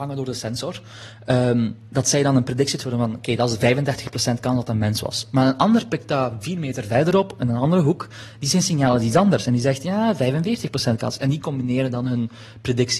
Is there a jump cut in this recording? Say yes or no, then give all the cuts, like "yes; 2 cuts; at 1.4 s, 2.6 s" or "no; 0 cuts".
no; 0 cuts